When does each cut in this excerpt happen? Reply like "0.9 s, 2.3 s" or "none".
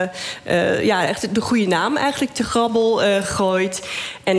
none